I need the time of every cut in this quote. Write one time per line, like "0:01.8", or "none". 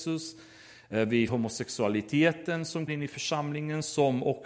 0:01.3
0:02.9